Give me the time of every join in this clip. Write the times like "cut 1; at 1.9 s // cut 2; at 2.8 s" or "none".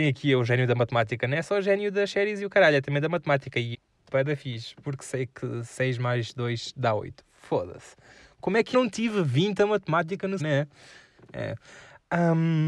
cut 1; at 3.7 s // cut 2; at 8.7 s // cut 3; at 10.4 s